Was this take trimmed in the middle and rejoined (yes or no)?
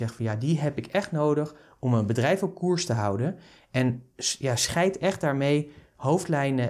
no